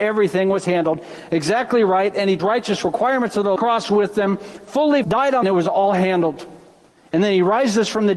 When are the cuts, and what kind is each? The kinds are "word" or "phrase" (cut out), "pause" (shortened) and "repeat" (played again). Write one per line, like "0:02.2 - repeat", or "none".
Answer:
0:02.4 - phrase
0:03.6 - phrase
0:05.0 - word
0:05.4 - phrase